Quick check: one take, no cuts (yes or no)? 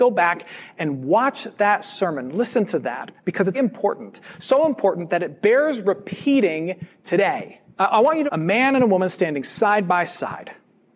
no